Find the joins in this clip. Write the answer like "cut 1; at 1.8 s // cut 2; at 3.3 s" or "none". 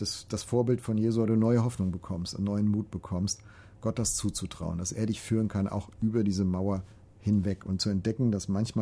none